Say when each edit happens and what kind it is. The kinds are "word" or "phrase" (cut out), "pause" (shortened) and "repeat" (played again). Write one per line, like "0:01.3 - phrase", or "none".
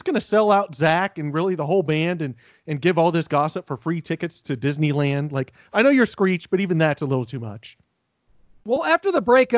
none